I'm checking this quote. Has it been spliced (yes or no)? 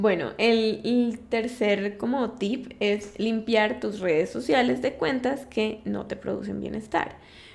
no